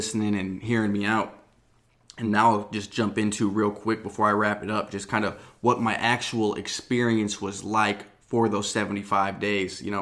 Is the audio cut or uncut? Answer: uncut